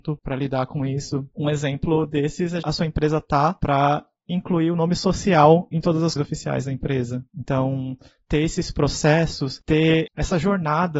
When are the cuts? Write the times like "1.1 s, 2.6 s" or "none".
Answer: 2.6 s, 6.2 s, 7.3 s